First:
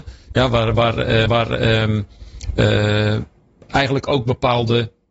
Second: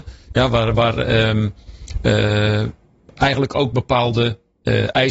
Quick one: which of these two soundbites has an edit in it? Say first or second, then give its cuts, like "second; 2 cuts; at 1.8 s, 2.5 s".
first; 1 cut; at 1.3 s